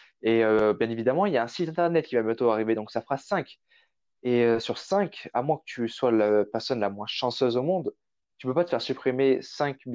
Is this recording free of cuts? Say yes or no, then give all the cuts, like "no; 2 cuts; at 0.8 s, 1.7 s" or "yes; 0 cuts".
yes; 0 cuts